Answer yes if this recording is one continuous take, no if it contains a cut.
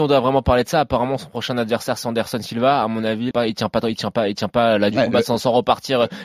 no